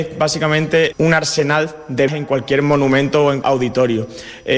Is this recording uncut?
no; 3 cuts; at 0.9 s, 2.1 s, 3.4 s

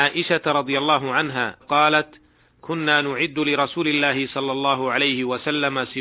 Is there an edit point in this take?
yes; 1 cut; at 1.6 s

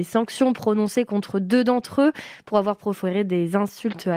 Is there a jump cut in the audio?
no; 0 cuts

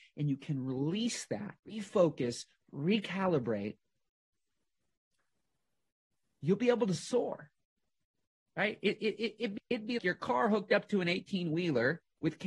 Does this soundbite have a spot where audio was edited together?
yes; 3 cuts; at 1.6 s, 9.6 s, 10.0 s

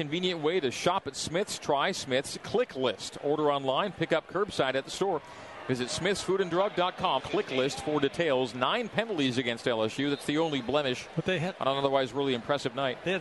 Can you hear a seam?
yes; 1 cut; at 7.2 s

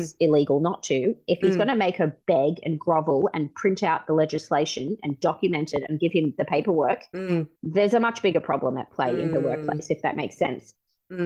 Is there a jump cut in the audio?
yes; 1 cut; at 7.6 s

